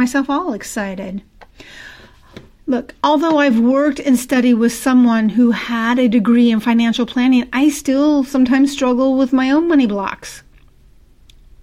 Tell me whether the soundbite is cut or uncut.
uncut